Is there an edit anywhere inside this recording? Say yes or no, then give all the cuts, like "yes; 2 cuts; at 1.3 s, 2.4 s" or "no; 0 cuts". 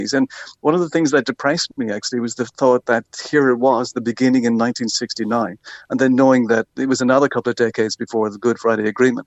no; 0 cuts